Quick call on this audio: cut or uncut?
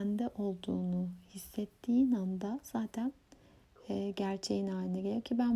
uncut